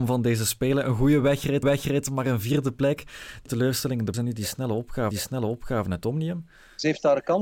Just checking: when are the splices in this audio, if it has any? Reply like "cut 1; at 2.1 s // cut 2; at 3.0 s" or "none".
cut 1; at 1.6 s // cut 2; at 3.5 s // cut 3; at 4.1 s // cut 4; at 5.1 s